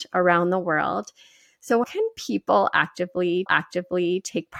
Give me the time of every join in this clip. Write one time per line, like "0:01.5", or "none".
0:01.8
0:03.5